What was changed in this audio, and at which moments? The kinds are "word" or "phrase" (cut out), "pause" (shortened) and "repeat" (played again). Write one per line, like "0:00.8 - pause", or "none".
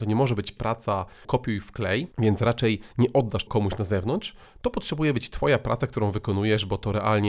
0:01.2 - word
0:02.1 - pause
0:02.9 - pause
0:03.5 - word

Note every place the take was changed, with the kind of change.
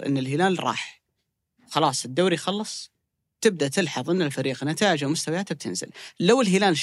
none

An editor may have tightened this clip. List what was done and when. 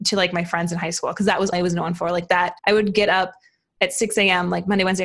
0:01.5 - word
0:02.6 - pause

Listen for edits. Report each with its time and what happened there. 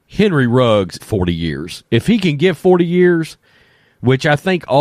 0:01.0 - phrase

